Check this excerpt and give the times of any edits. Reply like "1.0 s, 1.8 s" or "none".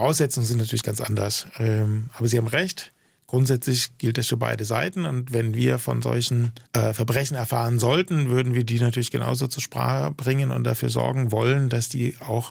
6.7 s